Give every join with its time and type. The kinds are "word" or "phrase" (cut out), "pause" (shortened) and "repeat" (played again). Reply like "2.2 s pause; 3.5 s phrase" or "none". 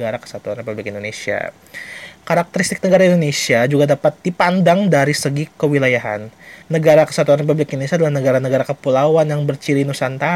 6.6 s pause